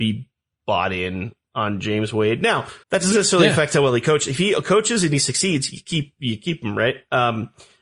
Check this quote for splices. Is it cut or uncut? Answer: cut